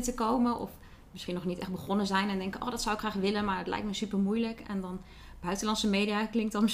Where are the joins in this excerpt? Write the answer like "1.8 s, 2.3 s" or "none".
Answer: none